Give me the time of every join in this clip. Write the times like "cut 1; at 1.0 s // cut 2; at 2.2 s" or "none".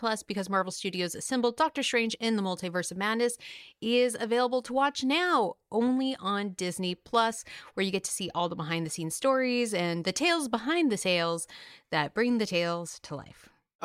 none